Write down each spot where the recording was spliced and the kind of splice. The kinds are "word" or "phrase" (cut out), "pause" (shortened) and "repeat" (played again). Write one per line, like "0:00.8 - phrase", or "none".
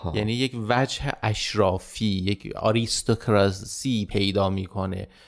none